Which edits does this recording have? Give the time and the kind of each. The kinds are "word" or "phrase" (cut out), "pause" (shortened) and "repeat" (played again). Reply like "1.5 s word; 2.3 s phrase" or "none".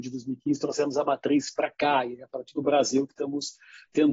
none